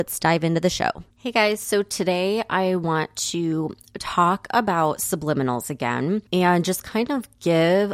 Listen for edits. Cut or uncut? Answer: cut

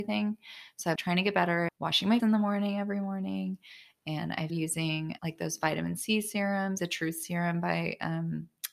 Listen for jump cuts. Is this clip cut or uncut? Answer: cut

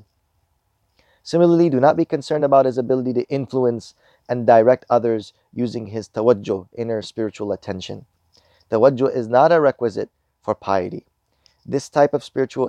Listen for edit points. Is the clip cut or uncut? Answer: uncut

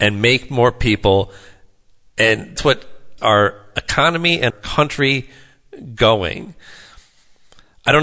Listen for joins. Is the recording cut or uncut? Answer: cut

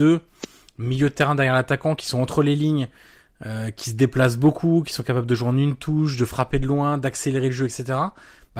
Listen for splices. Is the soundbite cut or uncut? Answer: uncut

